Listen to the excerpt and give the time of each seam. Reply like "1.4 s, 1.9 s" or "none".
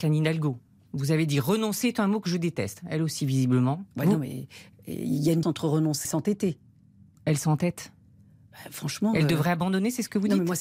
3.9 s, 5.4 s, 6.0 s